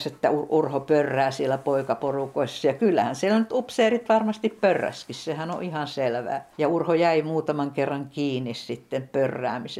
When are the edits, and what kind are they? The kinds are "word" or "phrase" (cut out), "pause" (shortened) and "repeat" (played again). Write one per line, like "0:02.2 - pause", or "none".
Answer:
0:06.5 - pause